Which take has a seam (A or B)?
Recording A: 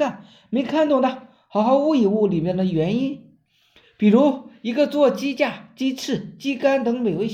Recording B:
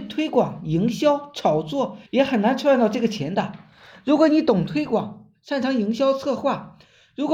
B